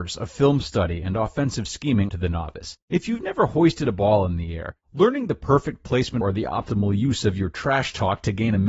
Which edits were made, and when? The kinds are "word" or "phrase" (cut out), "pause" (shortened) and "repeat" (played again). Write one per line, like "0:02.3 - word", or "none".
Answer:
0:02.1 - phrase
0:02.8 - pause
0:04.8 - pause
0:06.2 - phrase

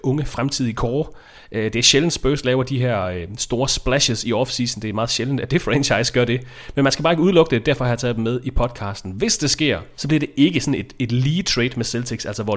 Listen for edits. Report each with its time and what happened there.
none

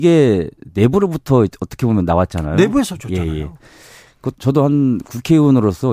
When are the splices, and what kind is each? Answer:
0:04.3 - word

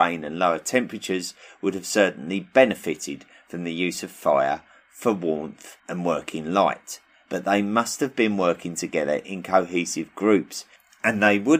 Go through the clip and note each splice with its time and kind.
0:05.8 - pause

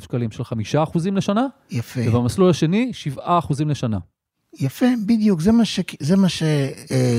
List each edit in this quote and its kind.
none

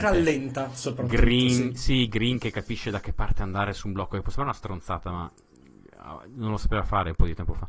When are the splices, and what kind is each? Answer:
none

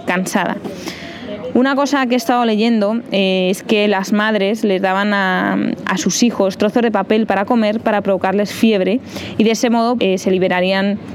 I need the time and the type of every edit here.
0:10.0 - word

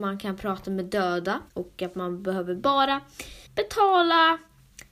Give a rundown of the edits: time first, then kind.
0:01.5 - pause
0:03.5 - pause

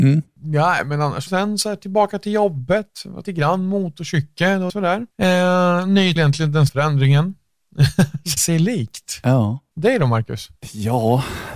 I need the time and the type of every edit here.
0:01.3 - word
0:03.2 - phrase
0:04.7 - word
0:06.2 - phrase
0:06.7 - word
0:08.4 - phrase

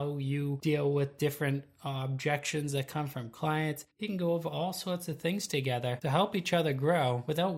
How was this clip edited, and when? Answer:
0:03.9 - pause

